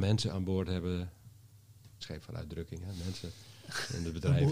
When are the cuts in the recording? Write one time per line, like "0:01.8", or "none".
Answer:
0:02.0